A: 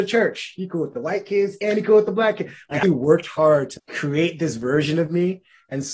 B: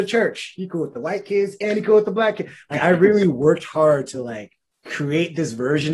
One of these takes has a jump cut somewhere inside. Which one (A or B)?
A